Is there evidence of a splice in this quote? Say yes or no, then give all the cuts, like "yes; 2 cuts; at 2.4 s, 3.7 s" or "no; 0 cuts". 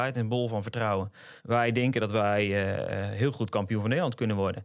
yes; 1 cut; at 1.4 s